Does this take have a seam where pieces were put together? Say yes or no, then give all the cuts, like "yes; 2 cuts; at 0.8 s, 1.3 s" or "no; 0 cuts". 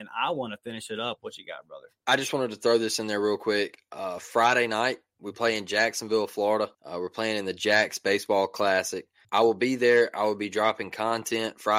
yes; 3 cuts; at 2.0 s, 6.7 s, 9.2 s